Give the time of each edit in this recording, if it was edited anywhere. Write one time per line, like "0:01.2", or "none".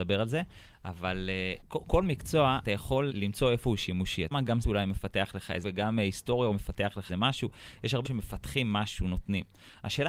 0:01.6
0:02.6
0:03.1
0:04.3
0:04.6
0:05.6
0:06.5
0:07.1
0:08.0